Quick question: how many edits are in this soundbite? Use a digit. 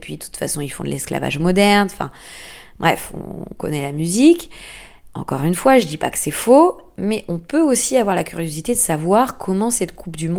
0